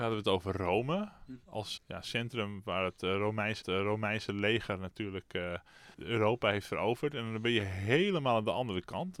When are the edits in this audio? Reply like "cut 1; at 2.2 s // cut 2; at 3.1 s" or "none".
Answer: cut 1; at 1.8 s // cut 2; at 3.6 s // cut 3; at 5.9 s